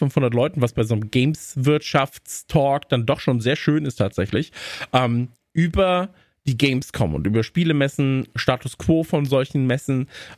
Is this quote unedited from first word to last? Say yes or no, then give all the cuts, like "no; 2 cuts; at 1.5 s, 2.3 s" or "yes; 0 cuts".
yes; 0 cuts